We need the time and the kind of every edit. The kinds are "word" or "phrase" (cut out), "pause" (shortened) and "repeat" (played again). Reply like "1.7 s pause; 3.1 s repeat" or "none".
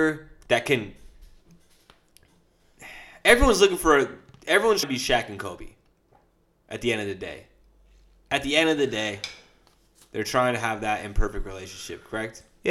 4.8 s word